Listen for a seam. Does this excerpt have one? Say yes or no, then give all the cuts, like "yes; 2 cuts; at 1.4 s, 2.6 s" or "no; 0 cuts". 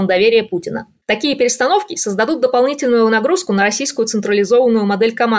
no; 0 cuts